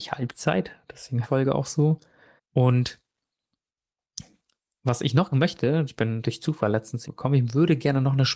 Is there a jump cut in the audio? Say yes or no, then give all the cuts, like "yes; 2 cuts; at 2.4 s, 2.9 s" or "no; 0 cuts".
yes; 6 cuts; at 1.2 s, 2.4 s, 5.3 s, 5.9 s, 6.2 s, 7.0 s